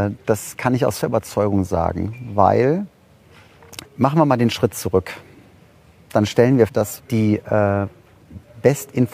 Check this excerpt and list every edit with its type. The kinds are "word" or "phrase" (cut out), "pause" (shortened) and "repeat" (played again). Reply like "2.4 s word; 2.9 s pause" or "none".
1.0 s word; 3.8 s word; 6.7 s word; 7.0 s word